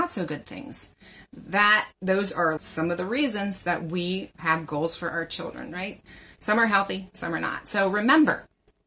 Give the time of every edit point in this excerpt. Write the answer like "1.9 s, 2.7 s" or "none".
1.9 s, 2.6 s, 4.3 s